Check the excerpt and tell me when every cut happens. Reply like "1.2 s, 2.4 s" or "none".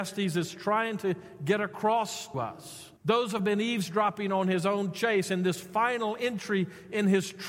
2.3 s, 3.0 s, 3.4 s